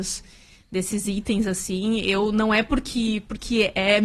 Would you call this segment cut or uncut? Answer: uncut